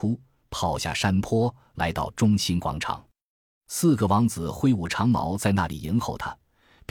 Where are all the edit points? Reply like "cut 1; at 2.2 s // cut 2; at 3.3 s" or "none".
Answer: none